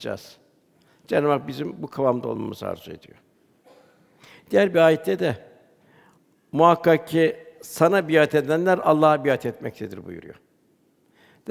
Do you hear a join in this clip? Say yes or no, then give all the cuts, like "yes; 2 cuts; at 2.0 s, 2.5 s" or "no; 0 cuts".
no; 0 cuts